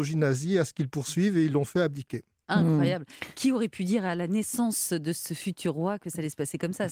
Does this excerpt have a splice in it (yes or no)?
no